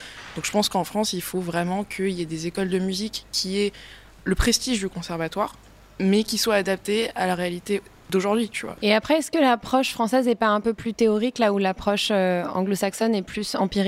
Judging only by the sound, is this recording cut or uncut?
uncut